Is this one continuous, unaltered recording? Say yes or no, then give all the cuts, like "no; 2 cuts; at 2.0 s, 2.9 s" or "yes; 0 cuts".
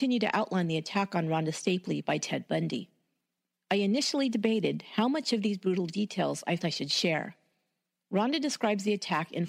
no; 1 cut; at 6.6 s